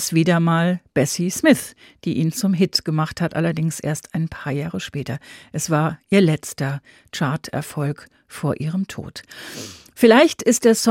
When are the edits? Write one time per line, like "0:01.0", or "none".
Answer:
none

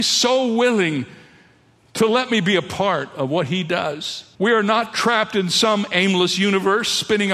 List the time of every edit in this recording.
0:04.3

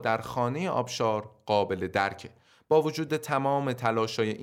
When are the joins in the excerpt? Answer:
none

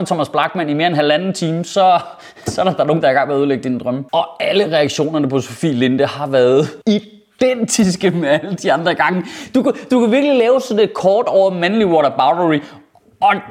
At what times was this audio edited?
0:04.1
0:06.8

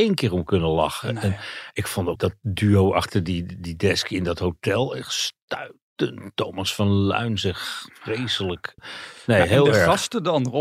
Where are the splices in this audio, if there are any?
none

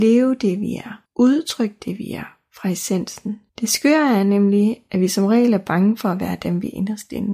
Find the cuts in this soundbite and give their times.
0:01.1
0:03.5

